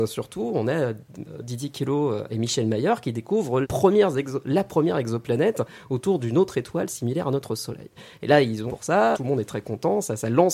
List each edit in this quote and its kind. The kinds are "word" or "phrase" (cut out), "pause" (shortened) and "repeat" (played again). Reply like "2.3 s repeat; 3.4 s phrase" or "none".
2.3 s word; 3.6 s phrase; 8.7 s phrase; 9.1 s word